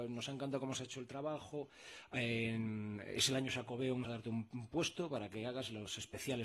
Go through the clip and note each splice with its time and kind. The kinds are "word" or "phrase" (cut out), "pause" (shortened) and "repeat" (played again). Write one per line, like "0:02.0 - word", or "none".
0:04.0 - phrase